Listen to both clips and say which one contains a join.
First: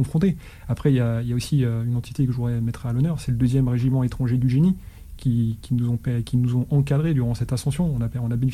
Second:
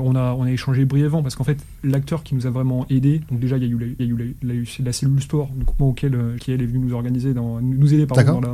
second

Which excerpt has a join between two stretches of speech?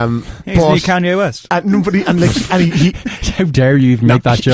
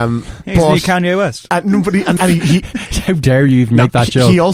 second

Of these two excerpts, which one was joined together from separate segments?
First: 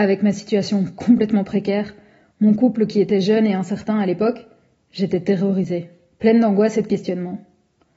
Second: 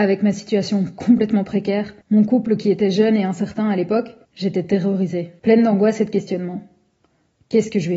second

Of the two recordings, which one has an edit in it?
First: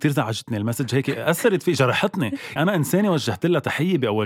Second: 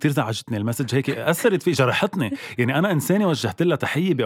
first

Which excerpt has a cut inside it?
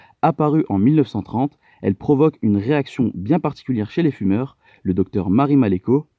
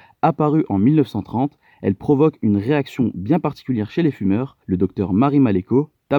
second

